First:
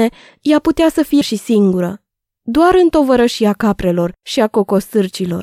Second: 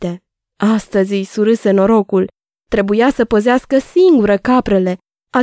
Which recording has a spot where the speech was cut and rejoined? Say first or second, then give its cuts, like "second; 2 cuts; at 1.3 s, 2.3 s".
first; 1 cut; at 1.2 s